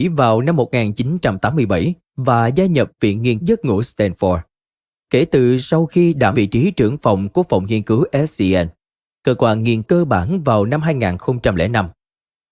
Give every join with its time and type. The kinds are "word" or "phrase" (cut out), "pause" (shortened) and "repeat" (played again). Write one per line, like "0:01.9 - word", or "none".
0:03.4 - word
0:06.3 - word
0:09.8 - word